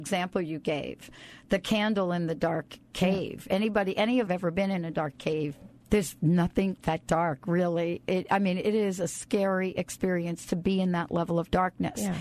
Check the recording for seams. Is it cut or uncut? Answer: cut